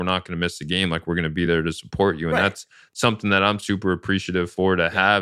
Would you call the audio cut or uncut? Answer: uncut